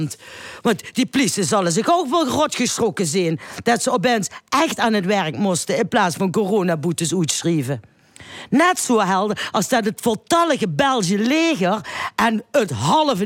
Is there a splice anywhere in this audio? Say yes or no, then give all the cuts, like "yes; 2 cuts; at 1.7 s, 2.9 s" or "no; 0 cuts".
no; 0 cuts